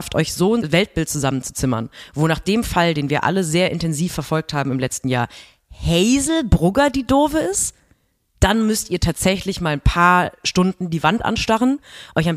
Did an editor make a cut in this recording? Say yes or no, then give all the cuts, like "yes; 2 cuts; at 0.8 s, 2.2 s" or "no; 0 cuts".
no; 0 cuts